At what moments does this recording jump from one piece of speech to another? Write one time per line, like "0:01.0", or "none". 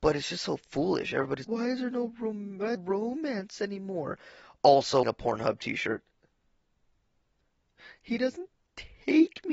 0:01.4
0:02.7
0:05.0

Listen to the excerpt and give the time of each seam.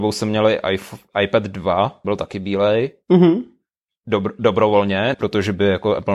0:02.0
0:03.8
0:05.1

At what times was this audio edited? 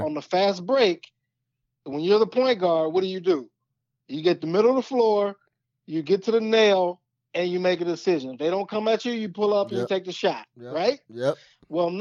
none

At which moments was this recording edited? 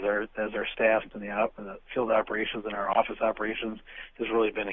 0:01.1

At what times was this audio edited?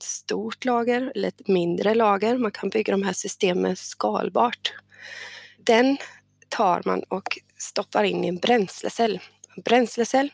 none

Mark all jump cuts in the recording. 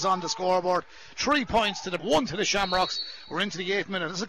0:02.0

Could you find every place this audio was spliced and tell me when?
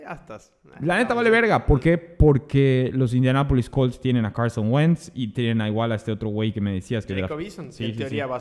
none

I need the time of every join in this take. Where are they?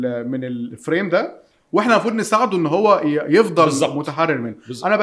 none

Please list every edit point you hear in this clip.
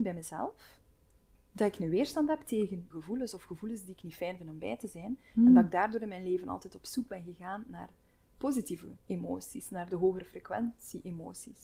0:02.9
0:09.0

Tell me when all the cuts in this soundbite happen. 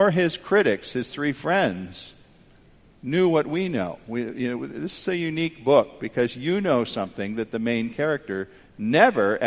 none

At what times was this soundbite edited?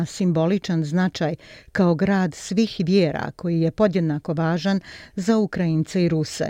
none

